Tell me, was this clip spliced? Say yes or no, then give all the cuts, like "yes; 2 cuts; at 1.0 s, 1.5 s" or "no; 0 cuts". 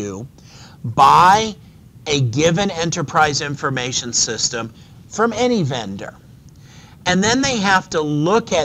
no; 0 cuts